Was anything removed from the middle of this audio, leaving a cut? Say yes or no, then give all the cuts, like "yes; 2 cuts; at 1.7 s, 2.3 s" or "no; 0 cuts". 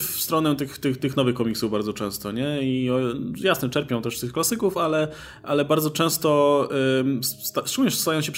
no; 0 cuts